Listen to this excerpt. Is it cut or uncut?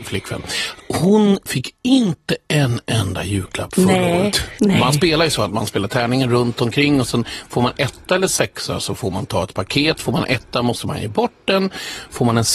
cut